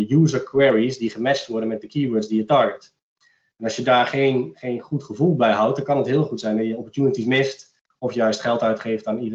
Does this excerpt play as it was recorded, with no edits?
yes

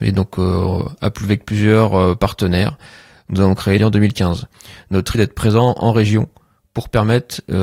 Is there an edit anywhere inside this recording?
yes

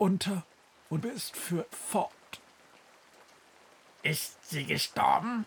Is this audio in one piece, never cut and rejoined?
no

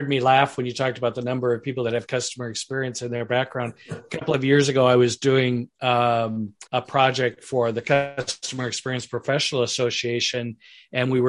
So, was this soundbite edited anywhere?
yes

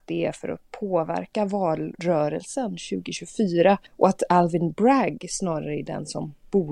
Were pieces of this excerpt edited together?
yes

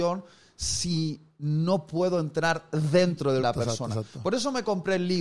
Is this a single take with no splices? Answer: no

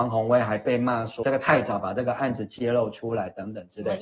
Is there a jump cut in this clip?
yes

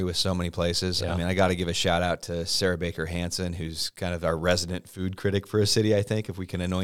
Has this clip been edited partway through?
no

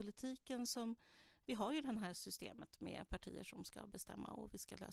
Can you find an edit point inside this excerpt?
no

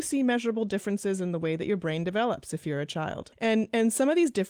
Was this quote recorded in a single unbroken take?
no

